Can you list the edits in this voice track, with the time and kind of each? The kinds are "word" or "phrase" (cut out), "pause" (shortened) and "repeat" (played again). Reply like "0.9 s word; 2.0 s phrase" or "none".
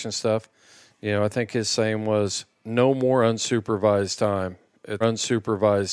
5.0 s repeat